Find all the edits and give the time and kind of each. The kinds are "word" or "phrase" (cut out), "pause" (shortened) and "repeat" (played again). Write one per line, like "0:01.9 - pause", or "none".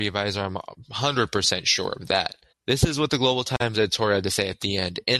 0:02.5 - pause